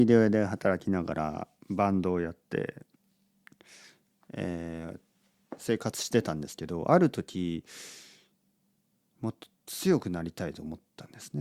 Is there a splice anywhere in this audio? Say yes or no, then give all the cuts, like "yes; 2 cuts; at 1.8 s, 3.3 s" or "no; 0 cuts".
no; 0 cuts